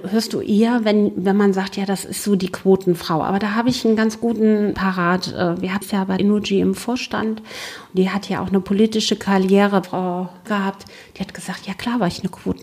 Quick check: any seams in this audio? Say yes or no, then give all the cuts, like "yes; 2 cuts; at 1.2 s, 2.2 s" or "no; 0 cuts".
yes; 5 cuts; at 4.7 s, 5.8 s, 6.2 s, 9.8 s, 10.5 s